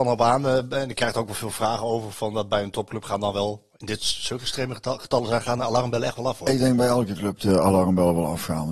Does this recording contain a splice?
yes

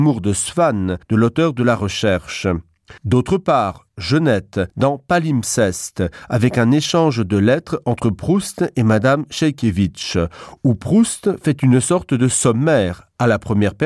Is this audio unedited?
no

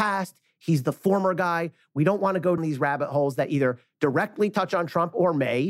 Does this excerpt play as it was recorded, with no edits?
no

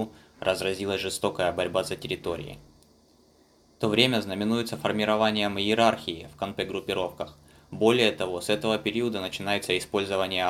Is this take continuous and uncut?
yes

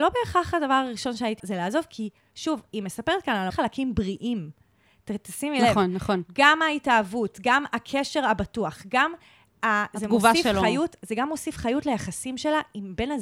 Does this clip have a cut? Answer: yes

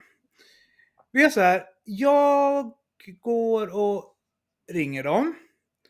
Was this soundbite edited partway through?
no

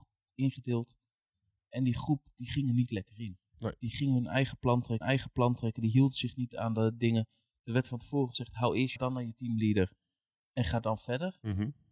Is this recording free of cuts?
no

